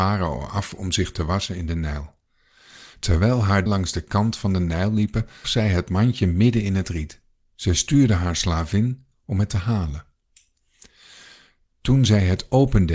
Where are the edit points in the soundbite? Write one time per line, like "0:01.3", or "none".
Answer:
0:03.7
0:05.4